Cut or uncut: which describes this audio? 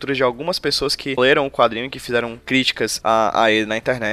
cut